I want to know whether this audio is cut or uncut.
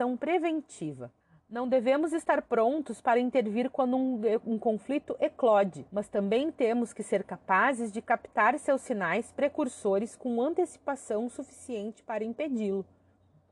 cut